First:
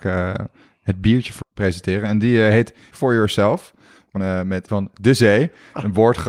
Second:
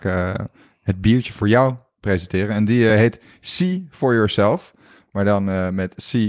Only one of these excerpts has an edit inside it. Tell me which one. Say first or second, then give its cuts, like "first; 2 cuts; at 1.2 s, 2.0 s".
first; 4 cuts; at 1.4 s, 2.9 s, 4.2 s, 4.7 s